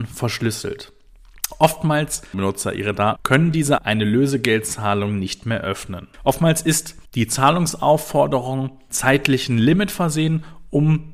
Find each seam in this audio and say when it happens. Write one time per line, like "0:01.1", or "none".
0:02.3
0:03.2
0:03.8
0:06.1
0:07.1
0:08.9